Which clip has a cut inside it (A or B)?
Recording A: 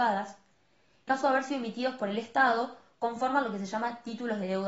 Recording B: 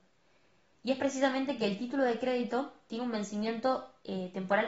A